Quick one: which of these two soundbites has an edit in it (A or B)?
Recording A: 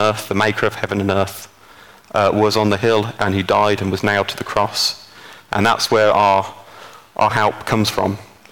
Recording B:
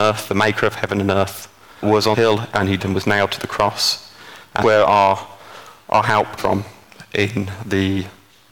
B